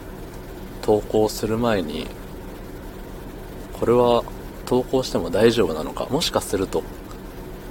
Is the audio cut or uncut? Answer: cut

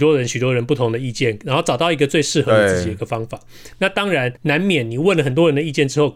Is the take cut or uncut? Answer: cut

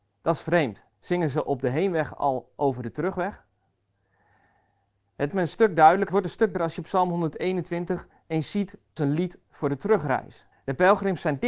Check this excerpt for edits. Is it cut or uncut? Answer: cut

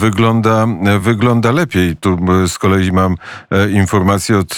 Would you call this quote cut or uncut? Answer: uncut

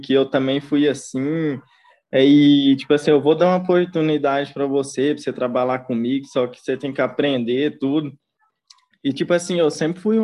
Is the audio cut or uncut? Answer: uncut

